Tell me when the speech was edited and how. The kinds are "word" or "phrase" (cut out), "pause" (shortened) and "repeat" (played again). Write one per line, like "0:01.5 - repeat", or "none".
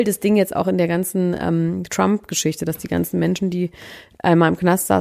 none